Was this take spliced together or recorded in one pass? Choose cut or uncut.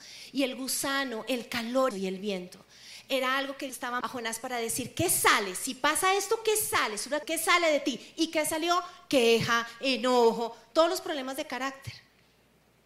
cut